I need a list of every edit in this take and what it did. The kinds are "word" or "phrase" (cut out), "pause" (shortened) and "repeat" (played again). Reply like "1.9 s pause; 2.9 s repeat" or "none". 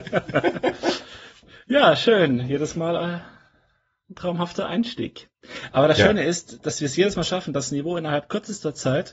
none